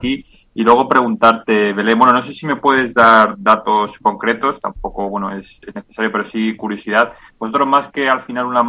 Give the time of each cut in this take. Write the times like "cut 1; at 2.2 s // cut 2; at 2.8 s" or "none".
none